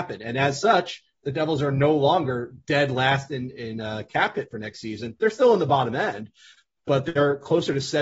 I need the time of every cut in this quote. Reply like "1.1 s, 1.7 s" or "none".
none